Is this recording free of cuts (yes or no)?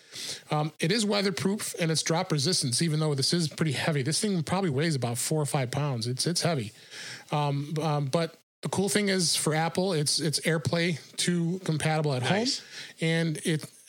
yes